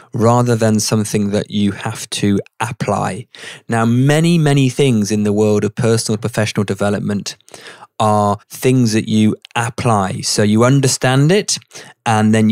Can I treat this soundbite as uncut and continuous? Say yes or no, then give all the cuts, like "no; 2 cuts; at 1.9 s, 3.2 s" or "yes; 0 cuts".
no; 1 cut; at 8.4 s